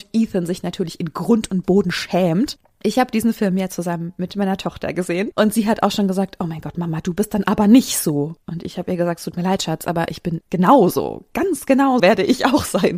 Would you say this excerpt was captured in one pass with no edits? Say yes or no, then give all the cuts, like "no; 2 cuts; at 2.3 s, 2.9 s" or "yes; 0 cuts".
no; 2 cuts; at 8.4 s, 12.0 s